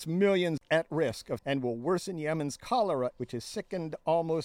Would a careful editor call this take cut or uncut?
cut